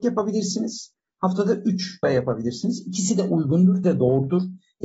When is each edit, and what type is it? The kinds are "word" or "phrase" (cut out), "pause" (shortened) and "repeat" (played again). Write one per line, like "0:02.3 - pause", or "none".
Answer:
0:02.0 - word
0:03.8 - word